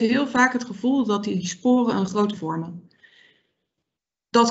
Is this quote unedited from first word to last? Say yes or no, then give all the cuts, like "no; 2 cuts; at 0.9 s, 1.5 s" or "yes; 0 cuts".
no; 1 cut; at 2.3 s